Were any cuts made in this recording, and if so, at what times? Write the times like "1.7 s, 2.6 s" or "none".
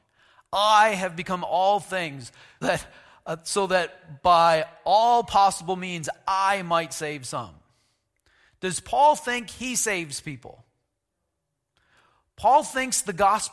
2.6 s

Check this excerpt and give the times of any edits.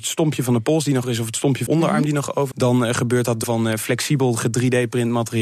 1.0 s, 1.7 s, 2.5 s, 3.4 s

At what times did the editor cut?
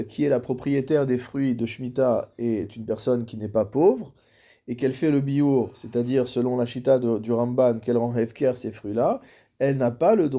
none

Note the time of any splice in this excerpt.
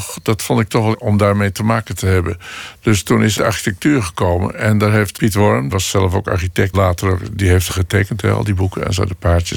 0.9 s, 3.4 s, 5.1 s, 5.7 s, 6.7 s, 7.7 s

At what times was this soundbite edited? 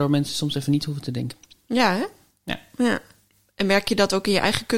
none

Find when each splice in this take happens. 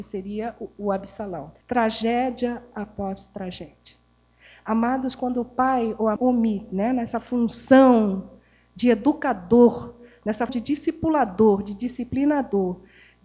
1.6 s, 6.2 s, 10.5 s

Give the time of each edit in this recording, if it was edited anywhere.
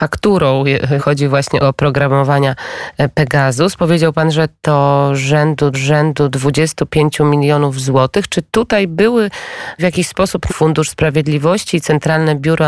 1.0 s, 1.6 s, 5.7 s, 9.8 s, 10.5 s

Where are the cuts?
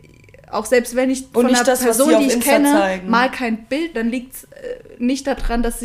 3.9 s

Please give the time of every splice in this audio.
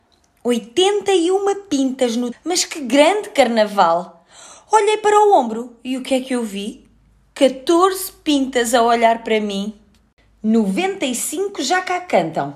2.3 s

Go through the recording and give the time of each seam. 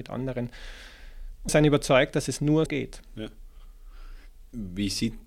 1.5 s, 2.7 s

